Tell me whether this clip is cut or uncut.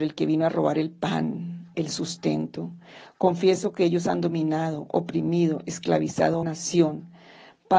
cut